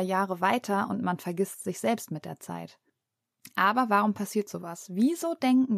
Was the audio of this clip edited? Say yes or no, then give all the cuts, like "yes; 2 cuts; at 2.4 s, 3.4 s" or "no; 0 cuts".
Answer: no; 0 cuts